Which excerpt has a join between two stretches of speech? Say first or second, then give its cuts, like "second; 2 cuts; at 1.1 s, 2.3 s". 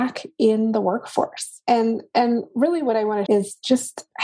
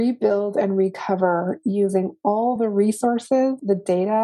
first; 1 cut; at 3.3 s